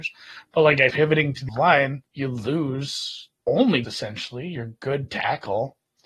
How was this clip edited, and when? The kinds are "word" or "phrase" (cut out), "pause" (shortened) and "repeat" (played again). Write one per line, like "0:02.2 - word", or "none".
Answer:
0:00.9 - word
0:01.5 - word
0:02.1 - pause
0:03.4 - word
0:03.8 - phrase